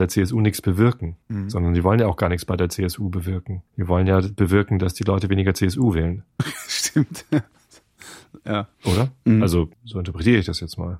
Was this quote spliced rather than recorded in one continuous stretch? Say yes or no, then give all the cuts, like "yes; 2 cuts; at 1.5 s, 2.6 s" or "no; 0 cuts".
yes; 4 cuts; at 1.2 s, 3.7 s, 8.7 s, 9.7 s